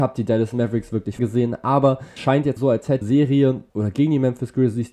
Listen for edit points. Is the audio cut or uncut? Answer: cut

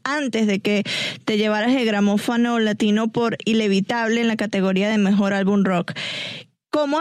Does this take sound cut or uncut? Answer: uncut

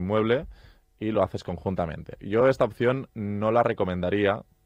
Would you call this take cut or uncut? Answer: uncut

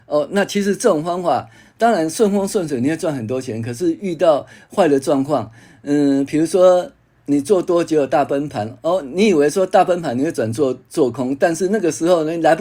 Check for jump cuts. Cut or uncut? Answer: uncut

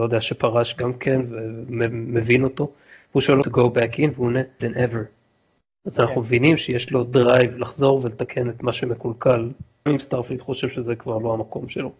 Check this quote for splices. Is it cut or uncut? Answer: cut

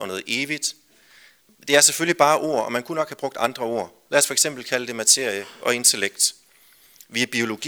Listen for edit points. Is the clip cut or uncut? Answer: uncut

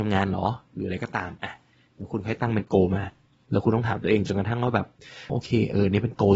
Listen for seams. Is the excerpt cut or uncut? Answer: cut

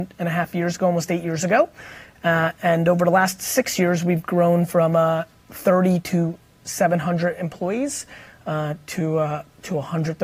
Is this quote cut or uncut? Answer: uncut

